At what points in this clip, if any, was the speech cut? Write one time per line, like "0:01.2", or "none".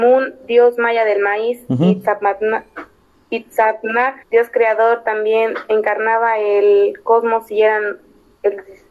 0:04.2